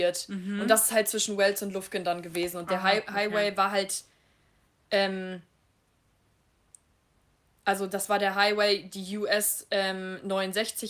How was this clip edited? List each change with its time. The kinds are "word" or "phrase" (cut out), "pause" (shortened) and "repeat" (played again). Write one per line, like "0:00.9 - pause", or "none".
none